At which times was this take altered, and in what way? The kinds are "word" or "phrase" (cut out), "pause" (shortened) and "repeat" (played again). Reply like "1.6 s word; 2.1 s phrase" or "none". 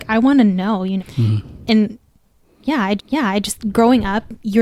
1.0 s word; 3.0 s repeat